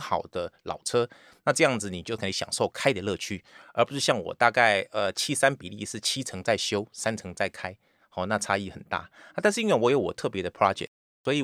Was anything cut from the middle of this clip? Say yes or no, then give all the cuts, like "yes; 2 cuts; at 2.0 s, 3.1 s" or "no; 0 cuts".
no; 0 cuts